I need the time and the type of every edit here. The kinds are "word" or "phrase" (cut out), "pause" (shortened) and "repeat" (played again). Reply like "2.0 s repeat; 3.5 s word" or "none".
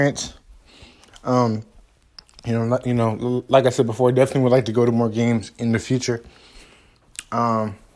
none